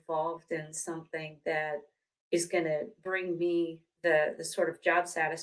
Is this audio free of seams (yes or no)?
yes